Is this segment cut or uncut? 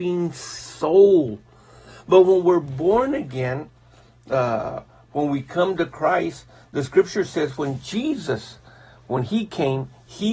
uncut